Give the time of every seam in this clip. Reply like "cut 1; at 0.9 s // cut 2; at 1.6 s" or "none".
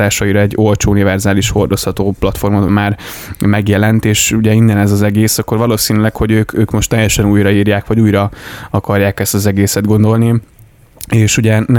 cut 1; at 2.7 s